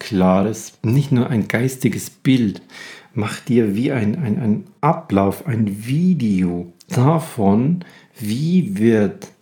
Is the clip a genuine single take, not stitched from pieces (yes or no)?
yes